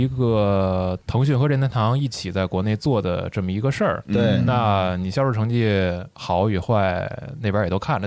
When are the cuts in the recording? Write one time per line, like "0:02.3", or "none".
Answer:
0:01.0